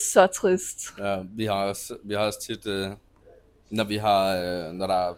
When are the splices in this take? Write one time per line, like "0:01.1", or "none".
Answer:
none